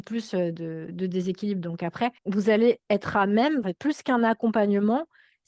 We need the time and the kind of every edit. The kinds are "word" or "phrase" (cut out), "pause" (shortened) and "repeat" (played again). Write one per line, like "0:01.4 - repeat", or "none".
0:02.2 - pause
0:03.6 - phrase

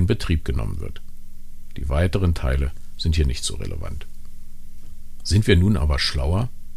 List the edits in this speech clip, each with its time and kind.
none

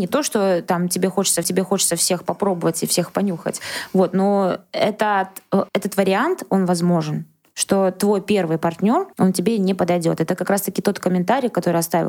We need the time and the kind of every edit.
0:01.4 - repeat
0:05.7 - pause
0:09.1 - pause

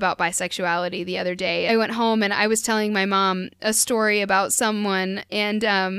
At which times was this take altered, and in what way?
0:01.7 - phrase

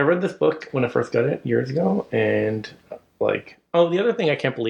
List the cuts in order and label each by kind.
none

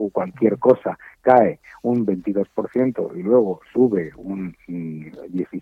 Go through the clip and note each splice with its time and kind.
none

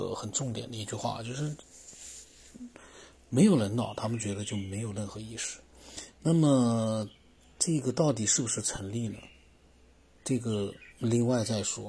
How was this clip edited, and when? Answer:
0:10.9 - pause

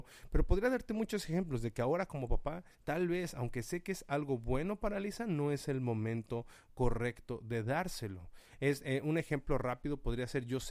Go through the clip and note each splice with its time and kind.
0:02.7 - pause

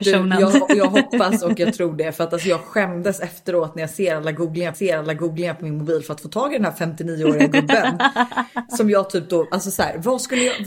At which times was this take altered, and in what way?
0:04.7 - repeat

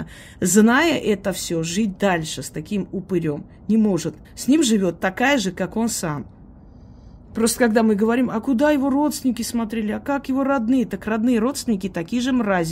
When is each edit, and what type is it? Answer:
0:04.2 - pause

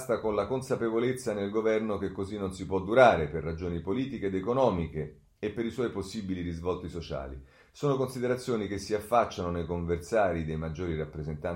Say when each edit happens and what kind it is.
none

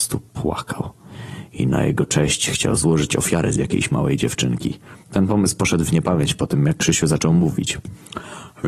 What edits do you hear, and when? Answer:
0:05.0 - pause

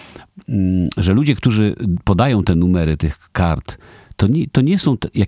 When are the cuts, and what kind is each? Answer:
none

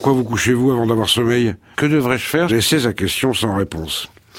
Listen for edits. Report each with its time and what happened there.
0:01.7 - word
0:02.5 - phrase

